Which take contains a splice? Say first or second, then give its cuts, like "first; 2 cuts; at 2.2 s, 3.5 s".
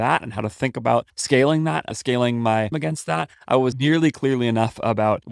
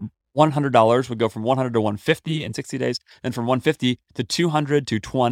first; 3 cuts; at 1.1 s, 2.7 s, 3.7 s